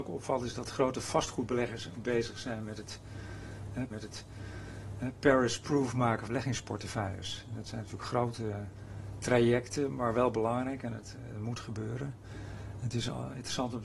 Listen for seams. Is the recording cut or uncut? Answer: cut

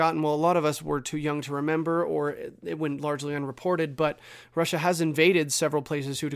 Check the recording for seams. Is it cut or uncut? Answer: uncut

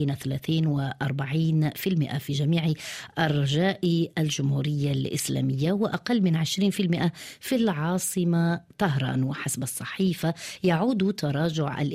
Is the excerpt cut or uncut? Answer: uncut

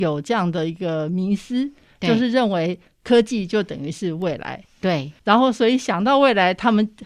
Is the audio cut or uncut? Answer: cut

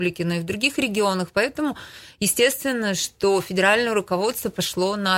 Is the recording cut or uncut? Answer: uncut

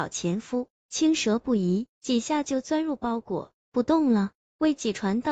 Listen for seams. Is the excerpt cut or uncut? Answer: cut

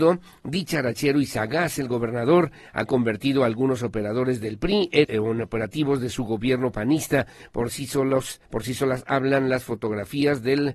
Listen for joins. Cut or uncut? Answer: cut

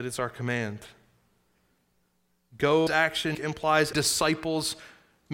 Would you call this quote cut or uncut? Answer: cut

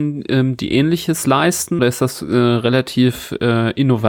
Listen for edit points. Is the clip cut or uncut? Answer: cut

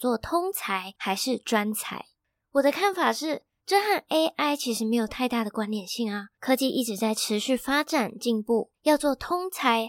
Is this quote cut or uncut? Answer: cut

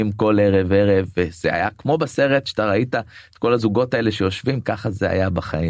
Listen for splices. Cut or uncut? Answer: uncut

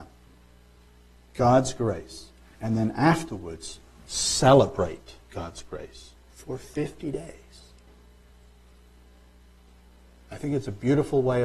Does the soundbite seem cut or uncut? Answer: cut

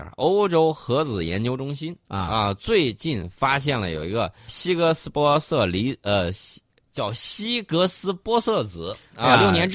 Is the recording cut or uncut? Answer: cut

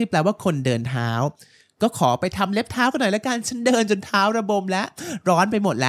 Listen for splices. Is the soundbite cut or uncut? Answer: uncut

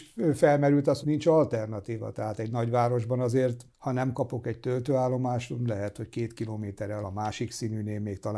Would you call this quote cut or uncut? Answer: cut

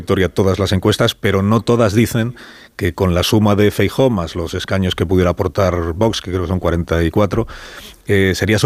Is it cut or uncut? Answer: uncut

